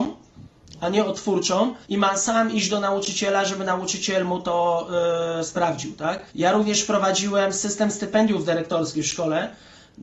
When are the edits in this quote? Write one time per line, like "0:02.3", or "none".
0:01.8
0:06.3